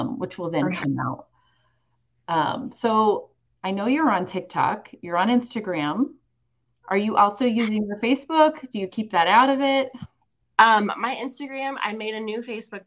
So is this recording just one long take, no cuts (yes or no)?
yes